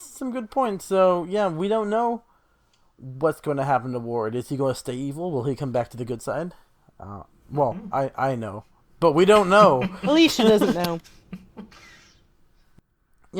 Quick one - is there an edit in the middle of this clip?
no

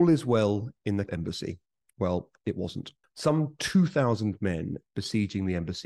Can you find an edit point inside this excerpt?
yes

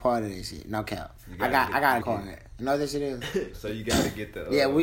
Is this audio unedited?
no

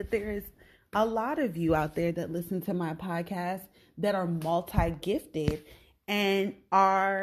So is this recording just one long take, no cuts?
yes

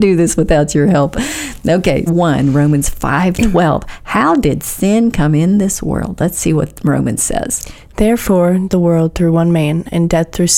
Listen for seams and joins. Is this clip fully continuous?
no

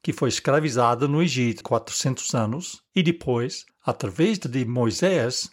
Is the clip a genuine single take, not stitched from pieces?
no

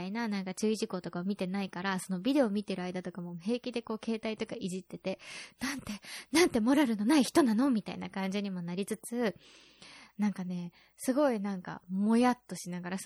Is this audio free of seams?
yes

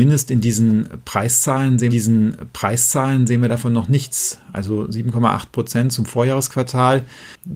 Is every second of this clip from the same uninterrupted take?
no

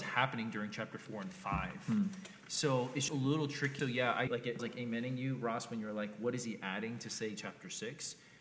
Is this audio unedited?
no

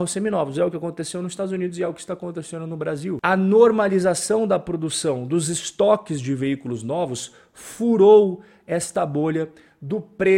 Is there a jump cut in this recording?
no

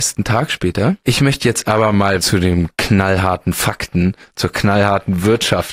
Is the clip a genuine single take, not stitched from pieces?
yes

